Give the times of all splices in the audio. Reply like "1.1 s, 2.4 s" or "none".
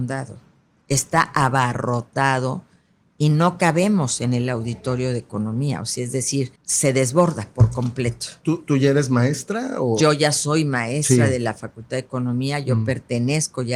6.6 s